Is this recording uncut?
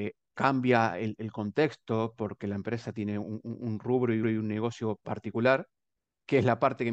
no; 1 cut; at 4.2 s

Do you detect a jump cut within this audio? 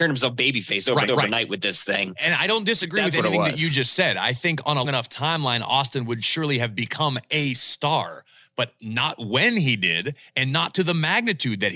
yes; 2 cuts; at 1.1 s, 4.8 s

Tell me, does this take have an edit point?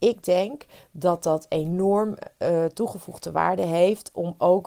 no; 0 cuts

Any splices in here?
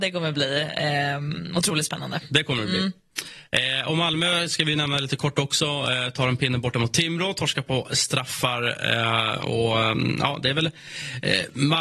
no; 0 cuts

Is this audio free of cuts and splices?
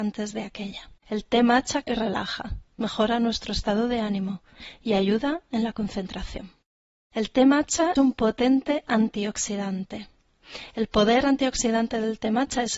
no; 5 cuts; at 1.0 s, 1.8 s, 2.7 s, 6.8 s, 8.0 s

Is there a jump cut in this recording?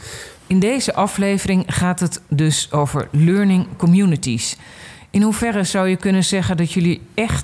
no; 0 cuts

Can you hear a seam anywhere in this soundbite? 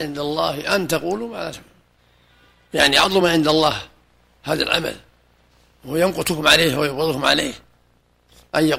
no; 0 cuts

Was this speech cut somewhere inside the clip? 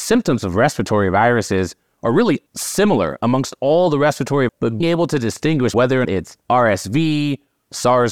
yes; 6 cuts; at 2.5 s, 4.5 s, 4.8 s, 5.7 s, 6.0 s, 6.4 s

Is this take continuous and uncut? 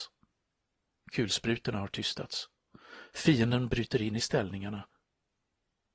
yes; 0 cuts

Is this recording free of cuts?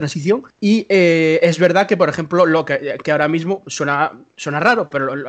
yes; 0 cuts

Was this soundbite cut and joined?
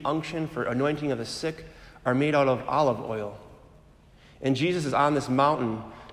no; 0 cuts

